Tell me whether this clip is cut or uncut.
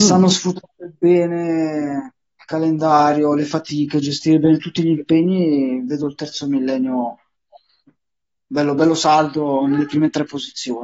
uncut